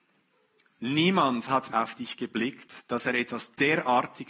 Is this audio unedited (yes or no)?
no